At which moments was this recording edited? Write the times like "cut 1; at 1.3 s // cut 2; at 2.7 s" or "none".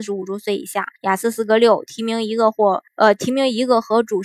cut 1; at 1.0 s // cut 2; at 2.9 s